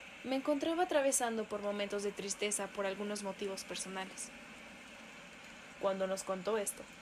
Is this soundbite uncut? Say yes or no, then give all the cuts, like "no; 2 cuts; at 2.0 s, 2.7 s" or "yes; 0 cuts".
yes; 0 cuts